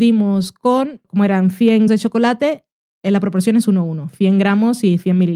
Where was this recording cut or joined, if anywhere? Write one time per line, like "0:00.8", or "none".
0:01.9